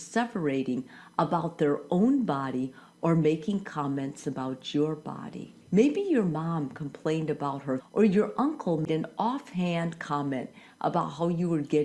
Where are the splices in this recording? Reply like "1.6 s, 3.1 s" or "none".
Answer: 5.6 s, 7.8 s